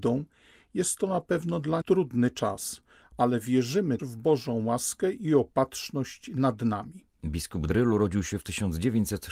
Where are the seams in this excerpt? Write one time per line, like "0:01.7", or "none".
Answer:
0:01.8
0:04.0
0:07.7